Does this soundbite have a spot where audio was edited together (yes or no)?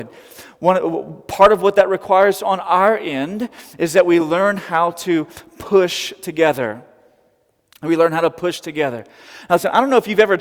no